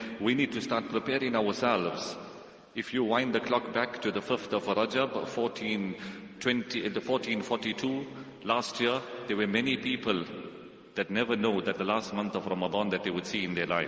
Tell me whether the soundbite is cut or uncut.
cut